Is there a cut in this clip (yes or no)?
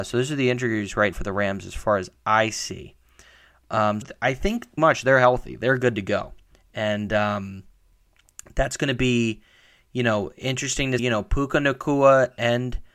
yes